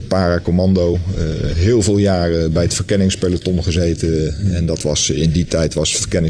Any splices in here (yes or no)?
no